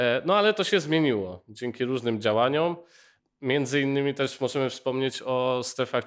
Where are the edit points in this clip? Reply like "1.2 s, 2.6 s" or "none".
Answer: none